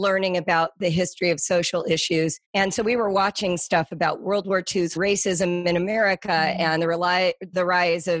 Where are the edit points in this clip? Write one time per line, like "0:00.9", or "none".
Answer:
0:02.4
0:05.0